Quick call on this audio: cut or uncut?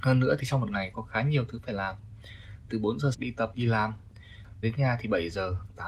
cut